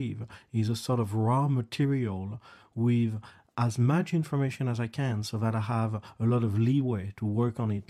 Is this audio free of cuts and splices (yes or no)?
yes